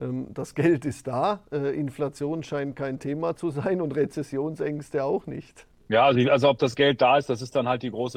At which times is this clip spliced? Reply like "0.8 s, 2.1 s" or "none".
none